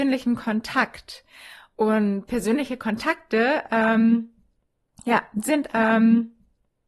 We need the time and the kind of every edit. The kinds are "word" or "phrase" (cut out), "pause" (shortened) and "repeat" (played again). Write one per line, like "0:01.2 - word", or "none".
0:05.7 - repeat